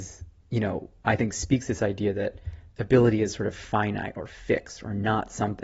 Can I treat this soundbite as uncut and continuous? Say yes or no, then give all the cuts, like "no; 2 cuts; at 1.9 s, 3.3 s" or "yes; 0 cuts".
no; 1 cut; at 2.7 s